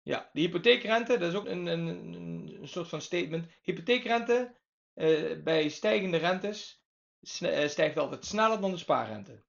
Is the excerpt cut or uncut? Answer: cut